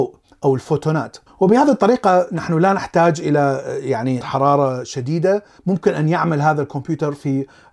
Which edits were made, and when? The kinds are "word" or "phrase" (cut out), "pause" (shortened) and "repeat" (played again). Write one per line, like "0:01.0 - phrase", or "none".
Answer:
0:04.2 - word